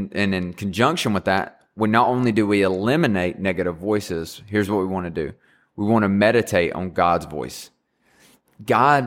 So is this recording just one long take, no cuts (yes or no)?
yes